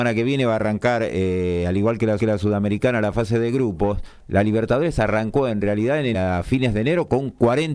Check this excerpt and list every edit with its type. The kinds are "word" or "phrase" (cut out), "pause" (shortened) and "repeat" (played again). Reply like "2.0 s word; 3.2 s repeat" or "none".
2.2 s repeat; 6.1 s word